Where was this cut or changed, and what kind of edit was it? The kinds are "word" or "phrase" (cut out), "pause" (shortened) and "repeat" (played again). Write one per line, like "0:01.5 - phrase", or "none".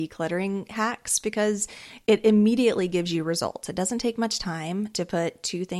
none